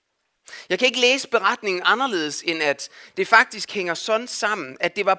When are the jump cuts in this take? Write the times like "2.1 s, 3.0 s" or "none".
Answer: none